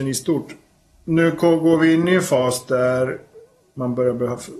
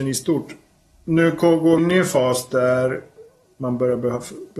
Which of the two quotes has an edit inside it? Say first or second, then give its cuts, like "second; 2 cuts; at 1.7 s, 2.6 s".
second; 1 cut; at 1.8 s